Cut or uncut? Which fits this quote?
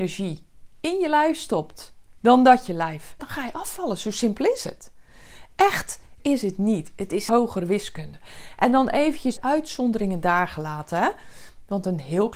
cut